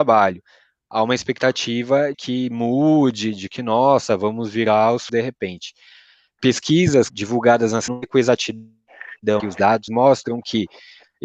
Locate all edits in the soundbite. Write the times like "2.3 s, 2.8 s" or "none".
2.1 s, 5.1 s, 7.1 s, 7.9 s, 9.4 s, 9.9 s